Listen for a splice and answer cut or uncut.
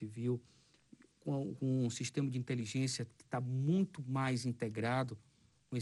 uncut